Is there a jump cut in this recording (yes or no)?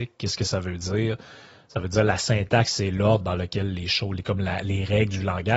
no